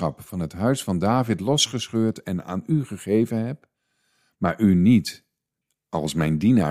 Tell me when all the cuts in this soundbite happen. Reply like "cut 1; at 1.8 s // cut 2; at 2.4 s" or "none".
none